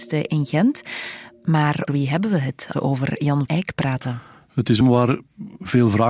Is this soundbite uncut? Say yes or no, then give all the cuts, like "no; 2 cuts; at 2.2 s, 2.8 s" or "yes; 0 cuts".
no; 4 cuts; at 1.9 s, 2.7 s, 3.5 s, 4.8 s